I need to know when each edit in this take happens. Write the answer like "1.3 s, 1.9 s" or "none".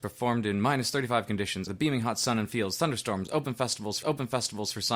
1.7 s, 4.0 s

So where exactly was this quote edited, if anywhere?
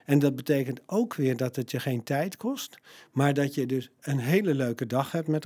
none

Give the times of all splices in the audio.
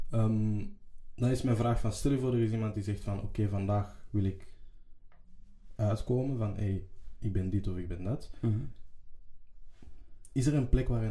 none

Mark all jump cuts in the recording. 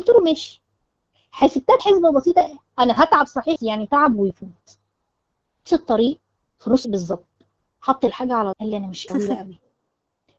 1.8 s, 3.6 s, 5.7 s, 6.8 s, 8.5 s, 9.1 s

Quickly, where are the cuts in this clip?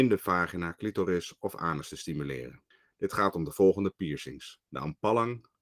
2.7 s, 4.6 s

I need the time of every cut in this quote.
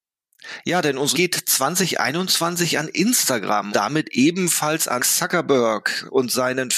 1.1 s, 3.7 s, 5.0 s

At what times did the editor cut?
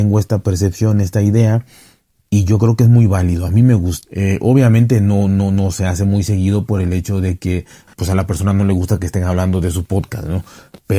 none

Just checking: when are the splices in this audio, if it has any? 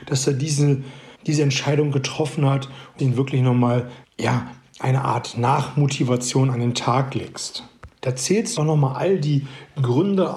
1.1 s, 3.0 s, 4.0 s, 8.0 s, 8.6 s

